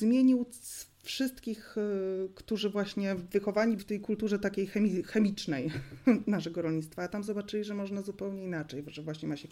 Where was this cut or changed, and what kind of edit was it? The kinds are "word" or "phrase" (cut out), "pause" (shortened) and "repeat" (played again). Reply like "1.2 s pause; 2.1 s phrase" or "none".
3.8 s word